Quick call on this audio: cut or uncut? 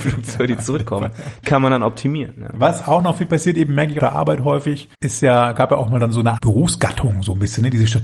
cut